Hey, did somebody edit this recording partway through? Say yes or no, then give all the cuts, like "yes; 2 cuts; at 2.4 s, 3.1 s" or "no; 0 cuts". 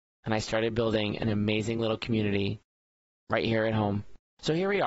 no; 0 cuts